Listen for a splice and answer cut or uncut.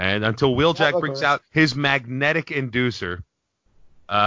cut